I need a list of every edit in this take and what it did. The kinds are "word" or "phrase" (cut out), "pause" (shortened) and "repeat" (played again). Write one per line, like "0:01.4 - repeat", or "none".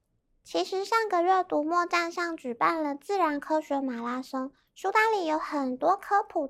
none